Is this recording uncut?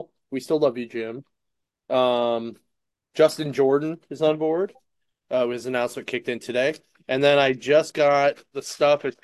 yes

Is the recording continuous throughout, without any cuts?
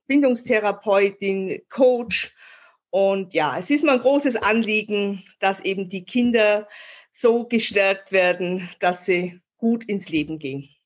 yes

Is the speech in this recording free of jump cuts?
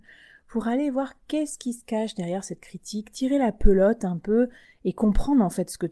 yes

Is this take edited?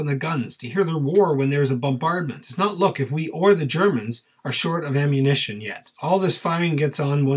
yes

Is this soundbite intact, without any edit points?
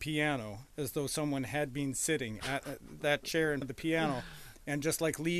no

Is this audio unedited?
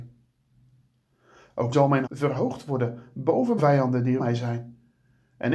no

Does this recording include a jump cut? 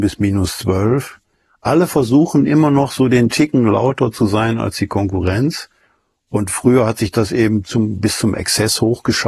no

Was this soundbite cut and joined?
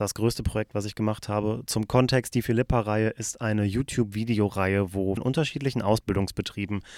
yes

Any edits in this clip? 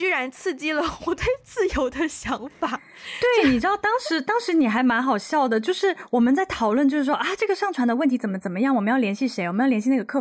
no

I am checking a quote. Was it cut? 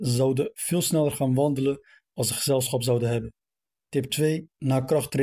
no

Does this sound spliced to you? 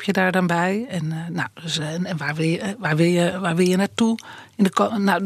no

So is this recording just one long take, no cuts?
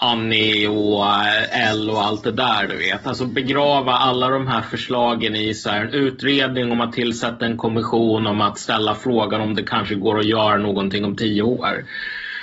yes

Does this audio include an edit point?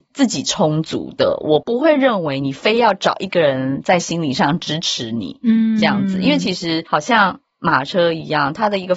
no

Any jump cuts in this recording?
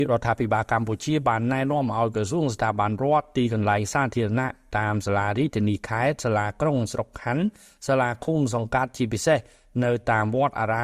no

